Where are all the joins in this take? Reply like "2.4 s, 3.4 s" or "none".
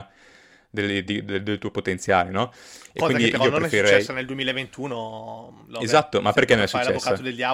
none